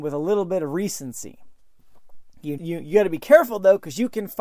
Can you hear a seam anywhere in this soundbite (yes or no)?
yes